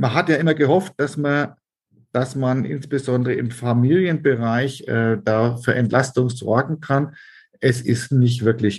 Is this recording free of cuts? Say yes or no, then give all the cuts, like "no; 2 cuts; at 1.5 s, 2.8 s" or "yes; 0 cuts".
yes; 0 cuts